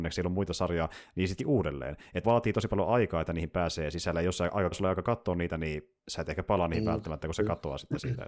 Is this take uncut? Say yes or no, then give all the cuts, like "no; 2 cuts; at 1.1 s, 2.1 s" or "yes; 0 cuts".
no; 4 cuts; at 1.4 s, 2.2 s, 4.7 s, 6.0 s